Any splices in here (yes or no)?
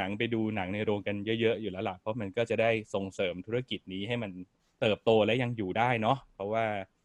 no